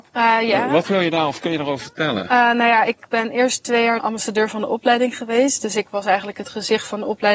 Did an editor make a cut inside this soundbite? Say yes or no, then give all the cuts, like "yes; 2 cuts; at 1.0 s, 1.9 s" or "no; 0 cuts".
yes; 1 cut; at 4.0 s